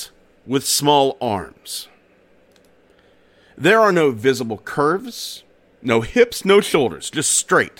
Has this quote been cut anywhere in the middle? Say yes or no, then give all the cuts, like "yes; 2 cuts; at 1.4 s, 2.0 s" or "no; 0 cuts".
no; 0 cuts